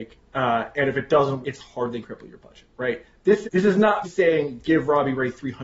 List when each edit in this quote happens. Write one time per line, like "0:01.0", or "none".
0:01.4
0:02.0
0:03.4
0:04.0